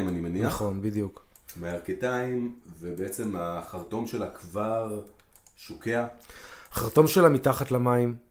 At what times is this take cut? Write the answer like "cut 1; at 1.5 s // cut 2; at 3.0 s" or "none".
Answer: none

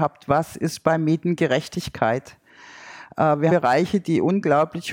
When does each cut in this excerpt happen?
cut 1; at 3.5 s

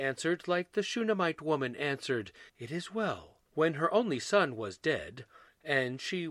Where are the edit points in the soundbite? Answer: cut 1; at 2.5 s // cut 2; at 3.5 s

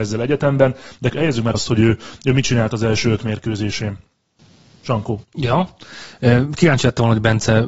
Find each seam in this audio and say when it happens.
cut 1; at 1.1 s // cut 2; at 1.5 s // cut 3; at 5.2 s

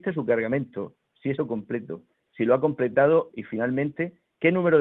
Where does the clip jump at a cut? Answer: cut 1; at 1.4 s // cut 2; at 3.3 s

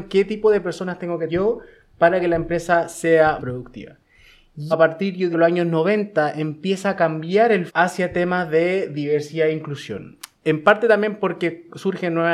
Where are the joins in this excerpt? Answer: cut 1; at 1.3 s // cut 2; at 3.4 s // cut 3; at 4.7 s // cut 4; at 5.3 s // cut 5; at 7.7 s

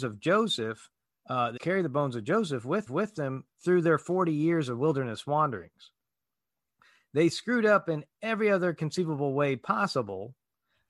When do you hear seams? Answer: cut 1; at 1.1 s // cut 2; at 1.6 s // cut 3; at 2.9 s

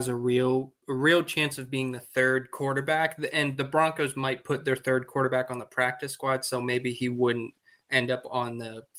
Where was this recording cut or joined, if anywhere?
none

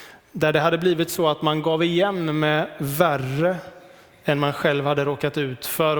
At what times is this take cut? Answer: none

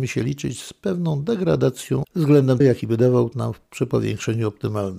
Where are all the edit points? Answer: cut 1; at 2.0 s // cut 2; at 2.6 s // cut 3; at 3.3 s

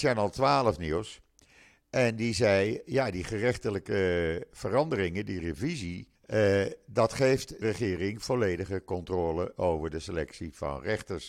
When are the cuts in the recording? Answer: cut 1; at 6.2 s // cut 2; at 7.6 s

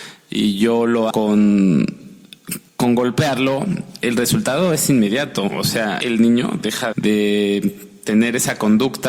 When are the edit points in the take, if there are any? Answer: cut 1; at 1.1 s // cut 2; at 2.7 s // cut 3; at 6.0 s // cut 4; at 6.9 s

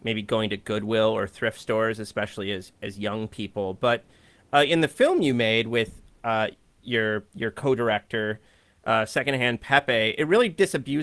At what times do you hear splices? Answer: cut 1; at 7.3 s

